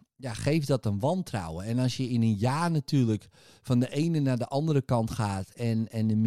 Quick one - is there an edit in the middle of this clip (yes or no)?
no